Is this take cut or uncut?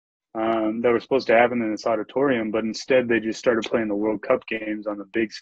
uncut